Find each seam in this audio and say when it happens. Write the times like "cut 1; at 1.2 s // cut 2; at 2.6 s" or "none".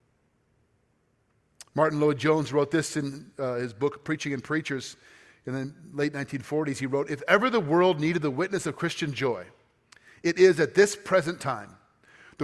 none